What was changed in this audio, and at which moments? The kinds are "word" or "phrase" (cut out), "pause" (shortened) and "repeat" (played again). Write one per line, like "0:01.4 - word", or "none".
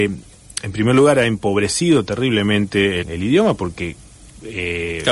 0:03.0 - word